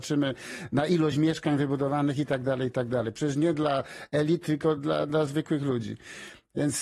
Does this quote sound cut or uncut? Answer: uncut